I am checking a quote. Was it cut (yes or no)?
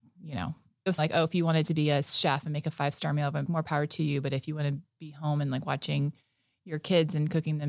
yes